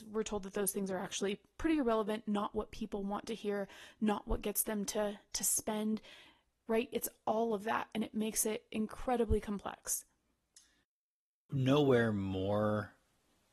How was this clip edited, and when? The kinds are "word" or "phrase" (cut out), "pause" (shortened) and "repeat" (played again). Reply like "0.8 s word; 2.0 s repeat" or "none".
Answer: none